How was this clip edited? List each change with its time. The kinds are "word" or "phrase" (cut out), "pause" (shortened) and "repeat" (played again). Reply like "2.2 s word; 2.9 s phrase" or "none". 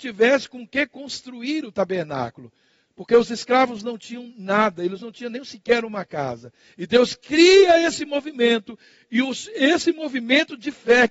none